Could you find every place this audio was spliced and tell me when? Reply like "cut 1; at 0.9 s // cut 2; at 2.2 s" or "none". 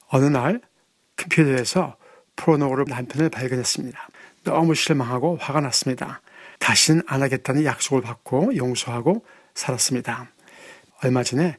cut 1; at 2.9 s // cut 2; at 6.6 s